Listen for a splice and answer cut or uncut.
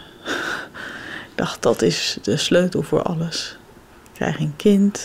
uncut